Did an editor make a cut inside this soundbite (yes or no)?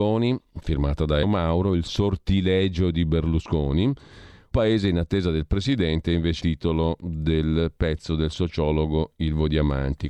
yes